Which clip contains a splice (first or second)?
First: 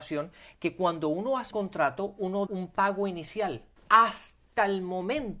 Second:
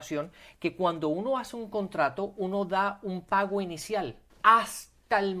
first